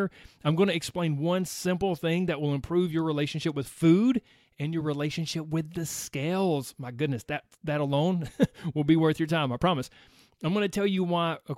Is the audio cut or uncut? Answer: uncut